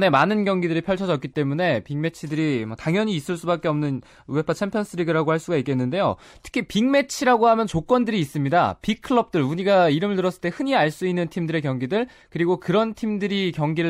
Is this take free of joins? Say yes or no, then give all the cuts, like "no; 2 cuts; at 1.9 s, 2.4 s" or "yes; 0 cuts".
yes; 0 cuts